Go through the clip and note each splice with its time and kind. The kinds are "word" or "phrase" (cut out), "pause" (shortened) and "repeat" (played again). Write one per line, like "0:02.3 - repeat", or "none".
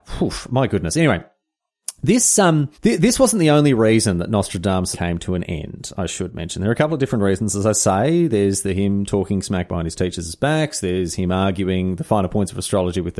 0:02.7 - pause
0:04.9 - word

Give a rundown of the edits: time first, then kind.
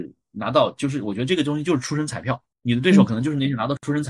0:02.5 - pause

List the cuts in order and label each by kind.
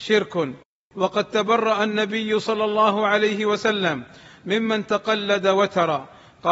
none

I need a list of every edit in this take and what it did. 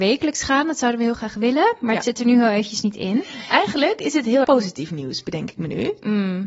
0:04.4 - word

